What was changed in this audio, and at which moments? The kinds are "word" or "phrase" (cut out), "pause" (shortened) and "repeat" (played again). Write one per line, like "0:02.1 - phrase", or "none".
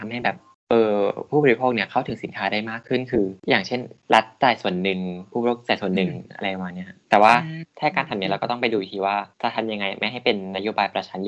0:03.4 - pause
0:07.0 - pause
0:09.3 - pause